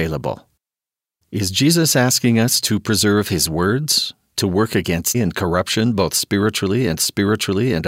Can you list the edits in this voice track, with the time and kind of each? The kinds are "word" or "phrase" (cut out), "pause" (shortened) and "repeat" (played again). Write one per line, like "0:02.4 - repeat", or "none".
0:05.1 - word
0:07.0 - repeat